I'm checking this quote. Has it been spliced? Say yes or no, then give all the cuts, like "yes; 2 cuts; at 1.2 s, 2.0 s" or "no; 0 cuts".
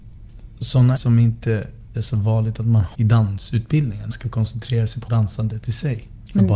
yes; 5 cuts; at 1.0 s, 1.9 s, 2.9 s, 4.1 s, 5.1 s